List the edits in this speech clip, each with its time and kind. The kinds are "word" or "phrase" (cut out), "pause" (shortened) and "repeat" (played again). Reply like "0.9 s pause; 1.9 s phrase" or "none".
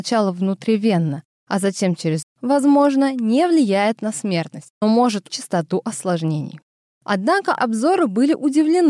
2.2 s word; 4.8 s word; 5.3 s word; 7.6 s word

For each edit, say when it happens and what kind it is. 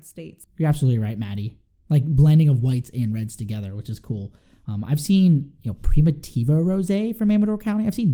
none

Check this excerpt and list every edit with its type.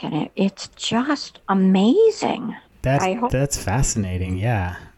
1.4 s pause; 3.0 s word

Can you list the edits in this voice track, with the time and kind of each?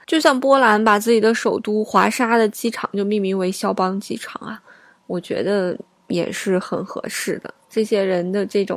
none

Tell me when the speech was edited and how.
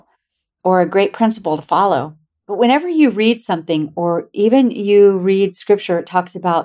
2.3 s pause

